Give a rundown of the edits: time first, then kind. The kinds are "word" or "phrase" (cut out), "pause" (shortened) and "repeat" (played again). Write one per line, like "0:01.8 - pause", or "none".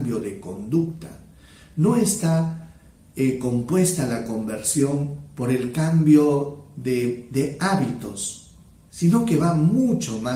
none